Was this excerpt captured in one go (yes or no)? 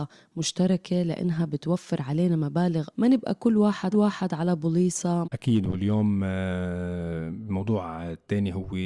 no